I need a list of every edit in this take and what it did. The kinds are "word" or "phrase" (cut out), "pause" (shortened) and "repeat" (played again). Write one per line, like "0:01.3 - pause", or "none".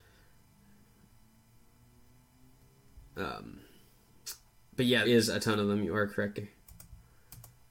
0:05.0 - word
0:06.4 - phrase

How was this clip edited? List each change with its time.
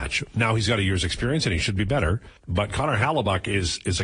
0:02.4 - pause

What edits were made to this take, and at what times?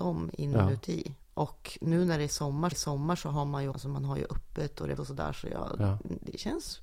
0:01.2 - pause
0:02.7 - repeat
0:03.7 - word
0:05.0 - word

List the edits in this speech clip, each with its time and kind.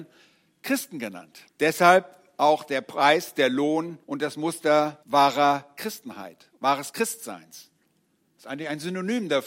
0:01.5 - pause
0:04.0 - pause
0:05.0 - pause
0:06.6 - pause

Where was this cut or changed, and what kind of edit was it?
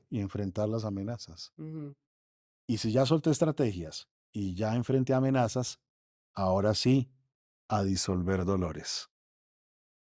none

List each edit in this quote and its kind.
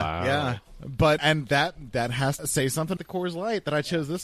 0:01.2 - word
0:02.4 - word
0:03.0 - word

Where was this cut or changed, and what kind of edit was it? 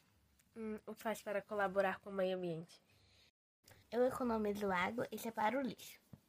0:01.0 - word
0:03.8 - pause

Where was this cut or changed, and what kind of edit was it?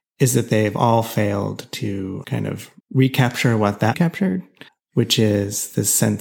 0:02.2 - word
0:02.8 - pause
0:03.9 - word
0:04.7 - pause

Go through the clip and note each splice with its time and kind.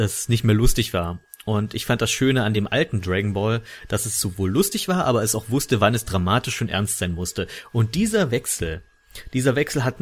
none

